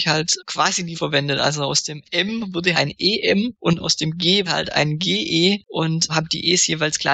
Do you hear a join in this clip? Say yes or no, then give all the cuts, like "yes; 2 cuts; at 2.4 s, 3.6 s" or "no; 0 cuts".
yes; 3 cuts; at 0.9 s, 2.7 s, 4.5 s